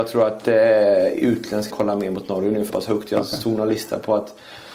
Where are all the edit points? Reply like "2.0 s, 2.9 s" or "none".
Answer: 1.7 s, 2.7 s